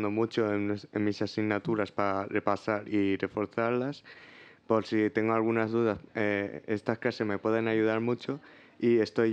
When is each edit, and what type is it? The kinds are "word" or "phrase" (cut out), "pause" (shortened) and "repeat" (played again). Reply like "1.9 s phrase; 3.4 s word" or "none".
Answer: none